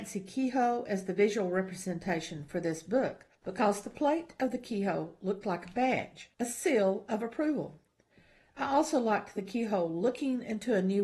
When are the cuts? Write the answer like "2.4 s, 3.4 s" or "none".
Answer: 3.3 s, 6.3 s